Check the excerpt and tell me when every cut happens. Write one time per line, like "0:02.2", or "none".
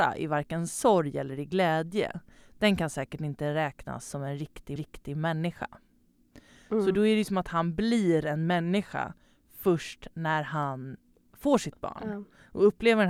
0:04.8

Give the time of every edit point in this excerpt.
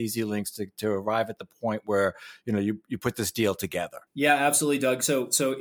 0:04.1

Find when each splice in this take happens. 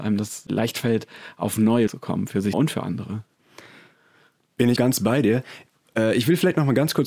0:01.9
0:02.5
0:04.8

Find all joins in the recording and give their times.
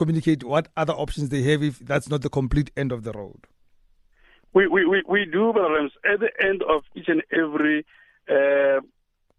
none

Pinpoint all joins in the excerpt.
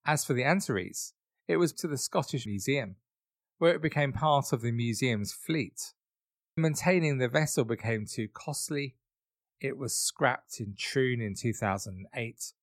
0:01.7
0:02.5
0:06.6

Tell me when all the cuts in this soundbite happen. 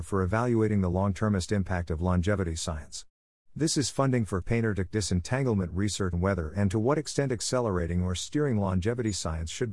0:04.4
0:04.9
0:06.1

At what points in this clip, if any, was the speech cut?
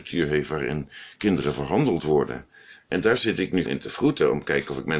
0:03.7

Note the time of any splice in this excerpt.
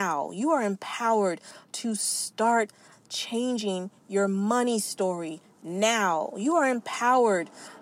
none

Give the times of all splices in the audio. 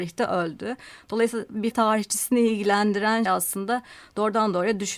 0:01.7
0:03.3

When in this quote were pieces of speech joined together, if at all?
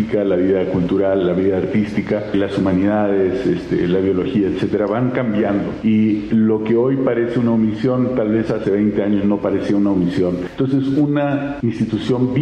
none

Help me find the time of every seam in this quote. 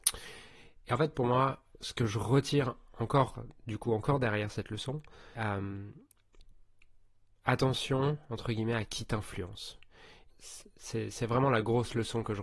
0:05.3
0:10.3

